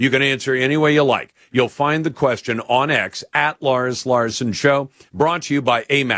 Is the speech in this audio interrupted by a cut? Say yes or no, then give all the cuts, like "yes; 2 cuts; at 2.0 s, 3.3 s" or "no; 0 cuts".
no; 0 cuts